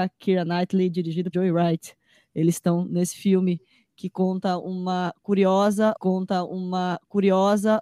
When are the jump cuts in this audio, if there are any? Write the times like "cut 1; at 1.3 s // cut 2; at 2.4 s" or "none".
cut 1; at 1.3 s // cut 2; at 6.0 s